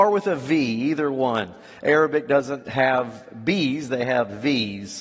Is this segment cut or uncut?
uncut